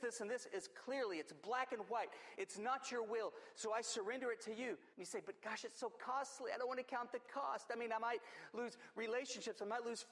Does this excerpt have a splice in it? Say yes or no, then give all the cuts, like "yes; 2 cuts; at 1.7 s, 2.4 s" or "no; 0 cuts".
yes; 1 cut; at 4.9 s